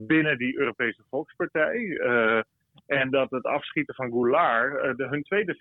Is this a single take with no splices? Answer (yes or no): yes